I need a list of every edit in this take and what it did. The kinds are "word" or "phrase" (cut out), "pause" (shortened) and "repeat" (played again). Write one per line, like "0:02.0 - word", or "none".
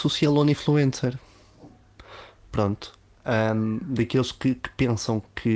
none